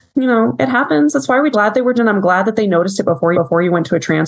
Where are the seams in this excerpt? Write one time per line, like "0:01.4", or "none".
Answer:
0:01.5
0:01.9
0:03.3